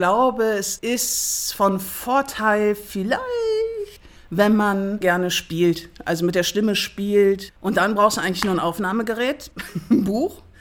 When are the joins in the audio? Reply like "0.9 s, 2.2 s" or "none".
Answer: none